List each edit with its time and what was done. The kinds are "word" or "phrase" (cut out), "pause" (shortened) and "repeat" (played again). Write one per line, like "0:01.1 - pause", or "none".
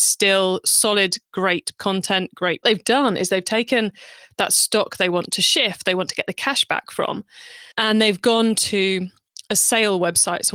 0:01.8 - word
0:02.6 - phrase
0:07.7 - pause